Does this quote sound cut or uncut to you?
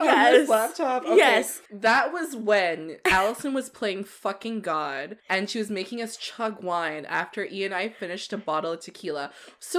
cut